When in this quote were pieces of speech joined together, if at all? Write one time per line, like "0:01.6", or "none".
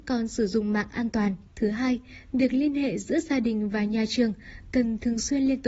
0:01.5